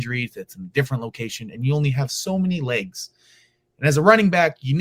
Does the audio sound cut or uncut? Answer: uncut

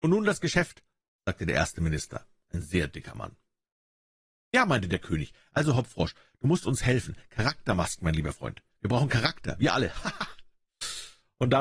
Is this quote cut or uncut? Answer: uncut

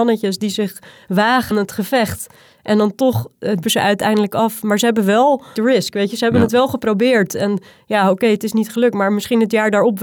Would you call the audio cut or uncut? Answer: cut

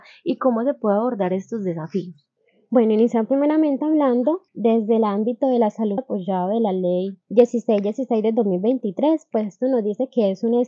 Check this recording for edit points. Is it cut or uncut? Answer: cut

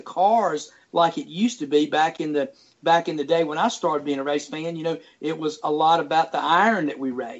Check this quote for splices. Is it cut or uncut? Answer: uncut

